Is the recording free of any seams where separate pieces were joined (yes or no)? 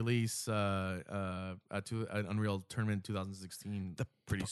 yes